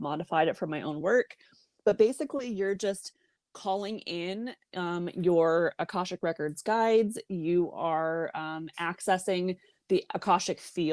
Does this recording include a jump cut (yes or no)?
no